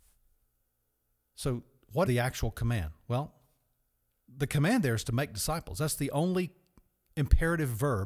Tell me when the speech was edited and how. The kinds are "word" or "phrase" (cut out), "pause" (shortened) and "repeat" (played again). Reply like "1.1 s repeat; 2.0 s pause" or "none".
2.1 s word